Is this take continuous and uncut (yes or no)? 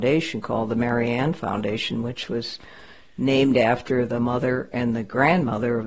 yes